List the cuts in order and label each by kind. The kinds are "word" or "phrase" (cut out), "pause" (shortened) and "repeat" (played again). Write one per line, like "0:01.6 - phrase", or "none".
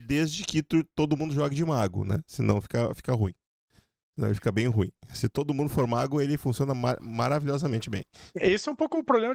none